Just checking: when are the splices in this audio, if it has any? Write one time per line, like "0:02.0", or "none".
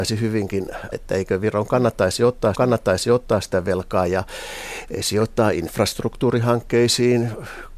0:00.9
0:02.5